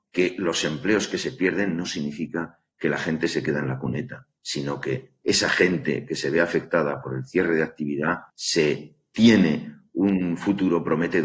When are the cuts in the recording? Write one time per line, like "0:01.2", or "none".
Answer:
0:04.4
0:08.3